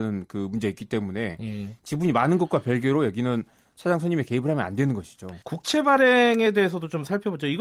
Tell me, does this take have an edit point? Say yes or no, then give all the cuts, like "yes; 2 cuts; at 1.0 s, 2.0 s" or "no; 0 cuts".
yes; 1 cut; at 5.4 s